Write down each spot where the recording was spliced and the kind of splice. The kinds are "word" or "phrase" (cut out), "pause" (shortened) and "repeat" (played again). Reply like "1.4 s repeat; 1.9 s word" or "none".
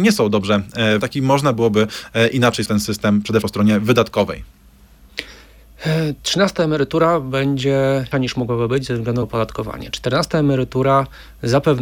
1.0 s word; 2.7 s word; 3.4 s word; 8.1 s word; 9.2 s word